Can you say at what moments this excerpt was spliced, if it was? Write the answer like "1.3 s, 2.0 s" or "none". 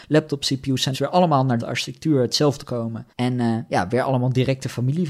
0.9 s, 1.6 s, 2.6 s, 3.1 s